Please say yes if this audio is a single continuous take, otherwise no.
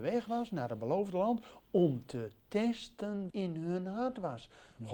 no